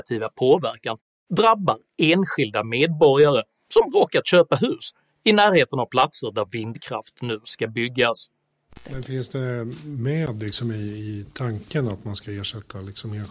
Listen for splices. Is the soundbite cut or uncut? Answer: uncut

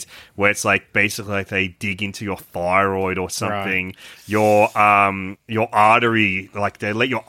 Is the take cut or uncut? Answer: uncut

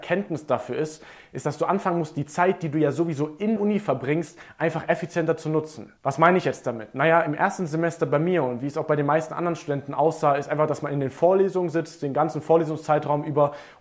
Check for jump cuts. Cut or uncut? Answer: cut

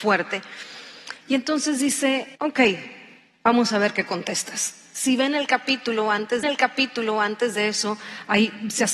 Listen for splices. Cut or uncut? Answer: cut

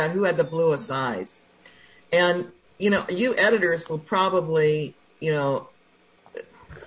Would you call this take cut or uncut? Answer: uncut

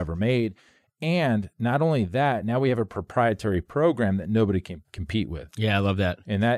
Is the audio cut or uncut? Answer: uncut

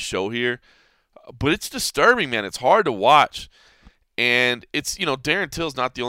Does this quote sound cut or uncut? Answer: uncut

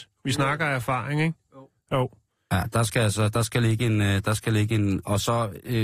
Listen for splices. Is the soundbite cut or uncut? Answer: uncut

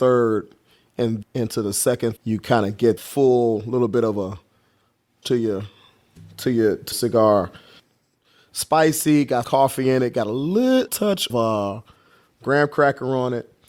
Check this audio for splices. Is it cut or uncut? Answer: cut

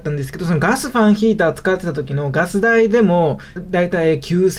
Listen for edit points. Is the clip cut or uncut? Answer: cut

